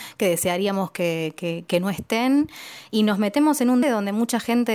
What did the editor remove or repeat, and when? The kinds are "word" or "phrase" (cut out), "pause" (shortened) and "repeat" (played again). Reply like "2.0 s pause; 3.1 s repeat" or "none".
3.8 s word